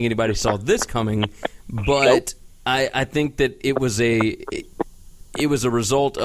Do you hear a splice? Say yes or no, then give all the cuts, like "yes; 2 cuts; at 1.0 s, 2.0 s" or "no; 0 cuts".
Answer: no; 0 cuts